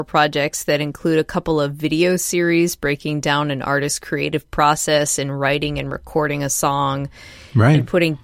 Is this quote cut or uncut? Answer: uncut